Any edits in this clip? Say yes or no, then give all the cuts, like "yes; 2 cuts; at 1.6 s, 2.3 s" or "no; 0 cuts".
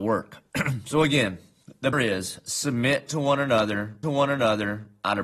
yes; 2 cuts; at 1.9 s, 4.0 s